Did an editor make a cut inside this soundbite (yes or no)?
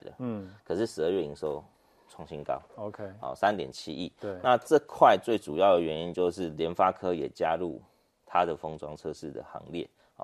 no